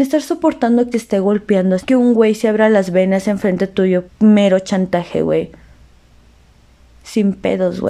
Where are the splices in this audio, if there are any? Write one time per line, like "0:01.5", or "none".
0:00.9
0:01.8
0:04.1